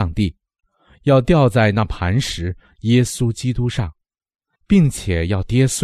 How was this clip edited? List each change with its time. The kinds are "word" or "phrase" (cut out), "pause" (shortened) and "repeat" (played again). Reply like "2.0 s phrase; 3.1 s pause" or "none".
none